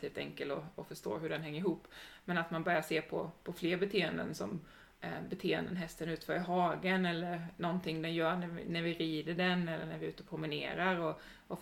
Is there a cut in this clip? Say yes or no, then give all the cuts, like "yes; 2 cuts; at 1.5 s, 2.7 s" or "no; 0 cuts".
no; 0 cuts